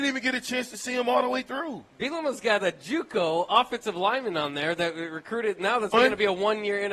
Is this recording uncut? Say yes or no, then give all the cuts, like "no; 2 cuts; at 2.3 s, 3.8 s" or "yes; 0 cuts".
no; 1 cut; at 5.9 s